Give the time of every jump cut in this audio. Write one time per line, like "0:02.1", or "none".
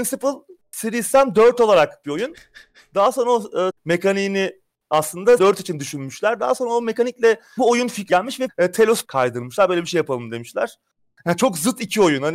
0:02.0
0:03.7
0:05.4
0:07.6
0:08.1
0:08.5
0:09.0